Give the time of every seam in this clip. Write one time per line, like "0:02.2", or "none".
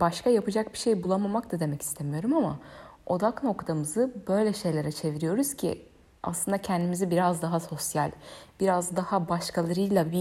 none